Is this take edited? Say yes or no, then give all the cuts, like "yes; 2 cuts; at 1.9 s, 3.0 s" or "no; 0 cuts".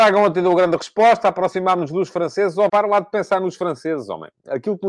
yes; 1 cut; at 2.7 s